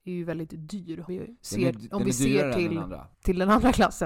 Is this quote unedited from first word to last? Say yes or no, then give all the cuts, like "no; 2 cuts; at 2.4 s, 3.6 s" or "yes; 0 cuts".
no; 2 cuts; at 1.1 s, 3.1 s